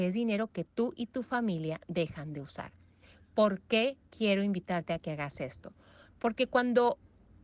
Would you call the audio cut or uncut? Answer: uncut